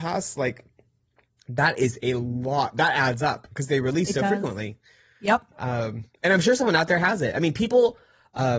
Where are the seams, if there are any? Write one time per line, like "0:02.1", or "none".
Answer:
none